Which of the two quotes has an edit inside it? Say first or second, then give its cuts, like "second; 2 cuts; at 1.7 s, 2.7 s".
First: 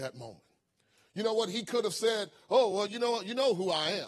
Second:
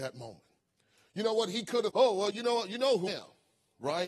second; 2 cuts; at 1.9 s, 3.1 s